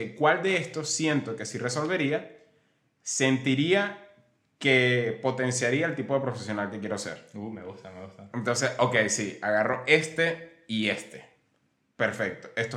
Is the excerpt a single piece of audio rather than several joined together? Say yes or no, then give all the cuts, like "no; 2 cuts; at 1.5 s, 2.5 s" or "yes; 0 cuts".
yes; 0 cuts